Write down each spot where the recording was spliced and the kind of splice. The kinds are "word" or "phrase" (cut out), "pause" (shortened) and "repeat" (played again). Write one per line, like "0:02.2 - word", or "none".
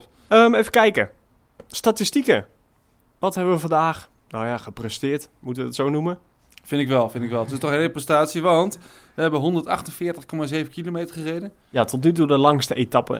none

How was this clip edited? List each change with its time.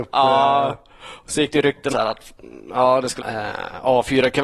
0:01.9 - word
0:03.2 - phrase

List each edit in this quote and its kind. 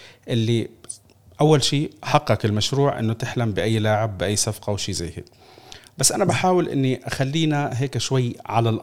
none

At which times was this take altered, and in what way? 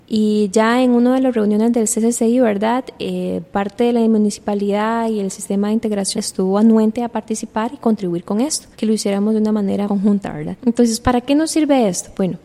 0:06.1 - word
0:08.7 - pause
0:09.8 - phrase
0:10.6 - pause

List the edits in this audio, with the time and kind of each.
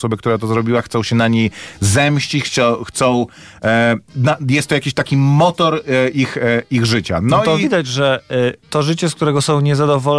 none

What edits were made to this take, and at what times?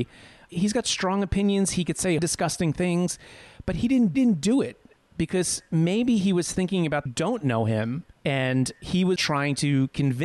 0:02.2 - word
0:04.1 - repeat
0:05.0 - pause
0:07.1 - phrase
0:08.1 - pause
0:09.2 - word

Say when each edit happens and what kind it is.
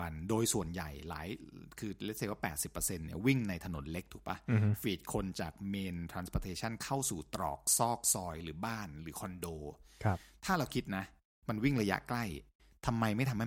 none

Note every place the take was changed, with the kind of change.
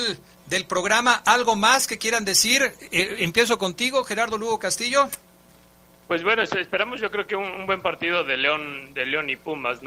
none

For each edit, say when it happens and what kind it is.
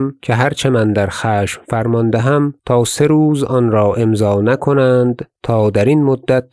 0:02.6 - pause
0:05.4 - pause

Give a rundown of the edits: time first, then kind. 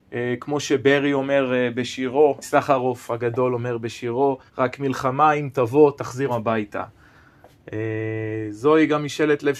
0:02.4 - word
0:04.5 - pause
0:06.3 - word

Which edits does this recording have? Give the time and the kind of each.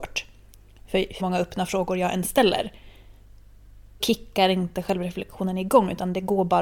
0:01.2 - word
0:04.0 - word

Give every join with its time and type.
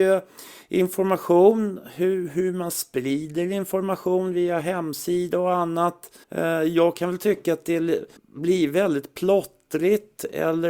0:06.2 - pause
0:08.2 - pause

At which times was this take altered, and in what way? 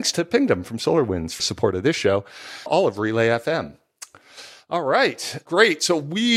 0:01.4 - word
0:02.7 - word

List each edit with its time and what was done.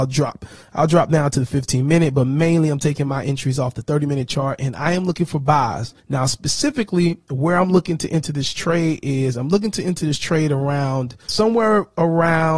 0:06.0 - pause
0:11.3 - word

